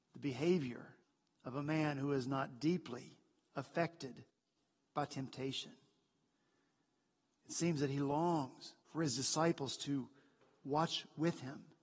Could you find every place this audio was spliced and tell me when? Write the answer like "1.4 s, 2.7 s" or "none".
1.0 s, 8.8 s